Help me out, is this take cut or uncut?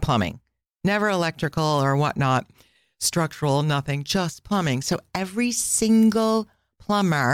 uncut